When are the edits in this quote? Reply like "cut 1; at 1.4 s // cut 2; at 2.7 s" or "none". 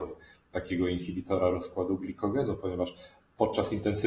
none